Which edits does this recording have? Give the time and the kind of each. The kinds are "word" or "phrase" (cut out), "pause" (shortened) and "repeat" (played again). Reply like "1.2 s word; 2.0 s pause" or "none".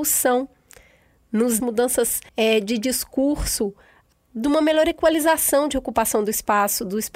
1.6 s phrase; 2.3 s pause; 4.1 s phrase